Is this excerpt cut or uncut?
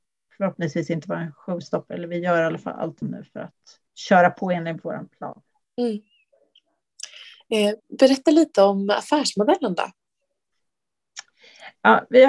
cut